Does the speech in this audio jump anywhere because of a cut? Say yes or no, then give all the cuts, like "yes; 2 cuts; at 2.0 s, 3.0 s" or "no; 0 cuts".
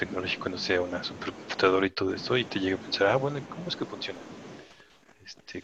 no; 0 cuts